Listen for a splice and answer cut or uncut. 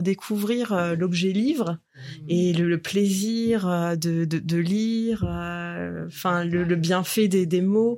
uncut